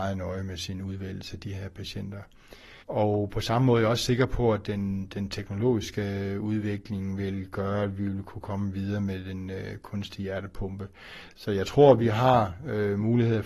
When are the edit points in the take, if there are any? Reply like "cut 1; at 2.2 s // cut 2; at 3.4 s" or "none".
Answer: cut 1; at 2.8 s